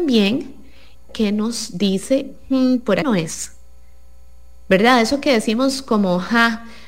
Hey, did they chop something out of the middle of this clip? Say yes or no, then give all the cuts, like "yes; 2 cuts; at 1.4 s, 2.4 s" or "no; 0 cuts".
yes; 2 cuts; at 1.1 s, 3.0 s